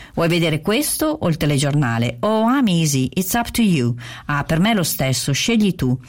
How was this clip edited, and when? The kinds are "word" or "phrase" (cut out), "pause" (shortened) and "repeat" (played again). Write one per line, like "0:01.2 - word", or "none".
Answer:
none